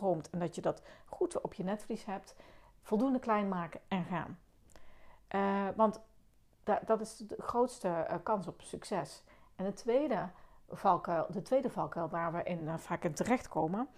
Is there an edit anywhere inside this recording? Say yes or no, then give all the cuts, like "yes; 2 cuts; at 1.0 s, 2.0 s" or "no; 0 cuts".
no; 0 cuts